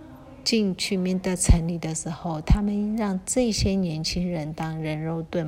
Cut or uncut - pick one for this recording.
uncut